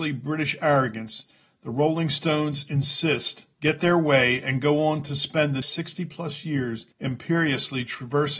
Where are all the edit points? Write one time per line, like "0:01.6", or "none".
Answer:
0:03.5
0:05.6
0:06.9